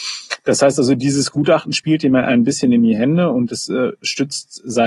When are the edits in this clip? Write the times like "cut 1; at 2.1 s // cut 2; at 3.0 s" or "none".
none